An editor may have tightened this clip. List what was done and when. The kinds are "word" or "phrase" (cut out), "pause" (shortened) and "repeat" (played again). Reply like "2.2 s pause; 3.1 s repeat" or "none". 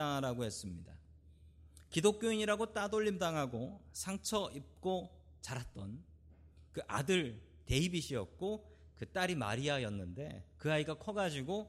none